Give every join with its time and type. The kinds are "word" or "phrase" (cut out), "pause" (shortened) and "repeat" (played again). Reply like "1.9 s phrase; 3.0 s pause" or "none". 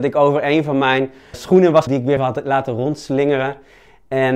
1.3 s word; 1.9 s word; 2.2 s word

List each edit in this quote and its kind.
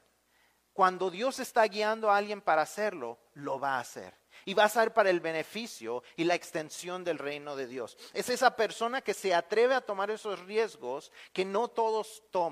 none

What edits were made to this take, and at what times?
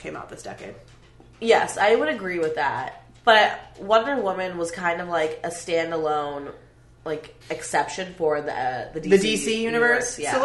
7.4 s pause

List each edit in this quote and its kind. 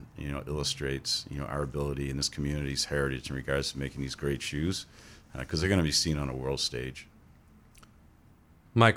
none

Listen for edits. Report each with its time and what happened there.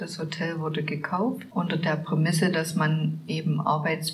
none

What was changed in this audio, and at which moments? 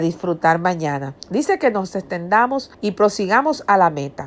1.2 s pause; 2.7 s pause

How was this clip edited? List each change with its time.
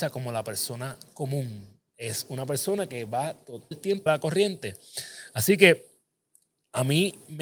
1.9 s pause; 3.7 s word; 4.1 s phrase

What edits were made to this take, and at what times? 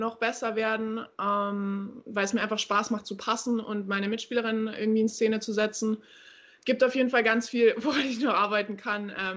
none

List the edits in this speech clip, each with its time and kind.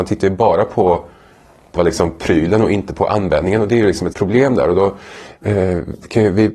1.8 s word; 4.1 s word

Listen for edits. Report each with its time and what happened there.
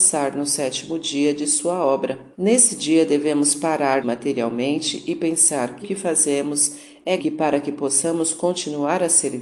2.3 s pause; 4.0 s phrase; 5.8 s phrase; 7.2 s phrase

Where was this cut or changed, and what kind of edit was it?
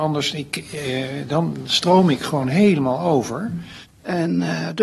none

